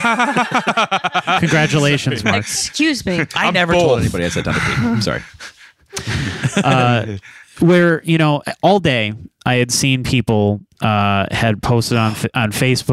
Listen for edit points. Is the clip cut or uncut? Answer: cut